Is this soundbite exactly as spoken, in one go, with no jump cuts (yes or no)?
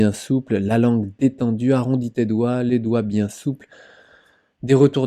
yes